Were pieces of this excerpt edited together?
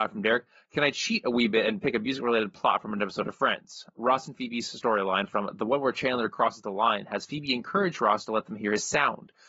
no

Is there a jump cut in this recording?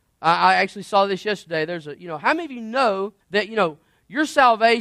yes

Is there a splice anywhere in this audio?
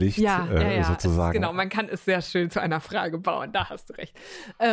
no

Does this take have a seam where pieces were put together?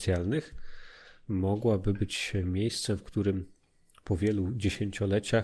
no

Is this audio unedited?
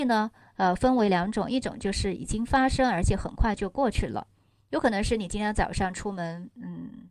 yes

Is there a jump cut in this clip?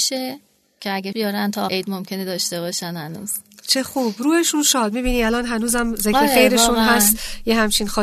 yes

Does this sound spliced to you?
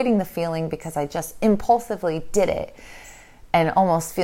no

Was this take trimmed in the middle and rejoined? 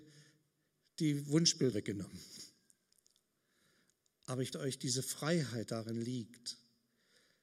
yes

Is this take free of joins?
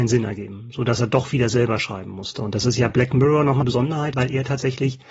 no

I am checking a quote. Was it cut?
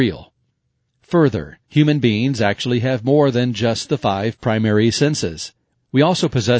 no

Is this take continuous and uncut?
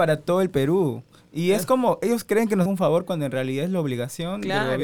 no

